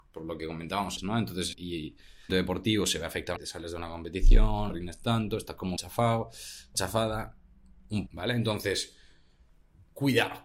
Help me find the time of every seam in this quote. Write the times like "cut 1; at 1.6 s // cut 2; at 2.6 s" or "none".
cut 1; at 1.0 s // cut 2; at 1.5 s // cut 3; at 2.3 s // cut 4; at 3.4 s // cut 5; at 4.7 s // cut 6; at 5.8 s // cut 7; at 6.7 s // cut 8; at 8.1 s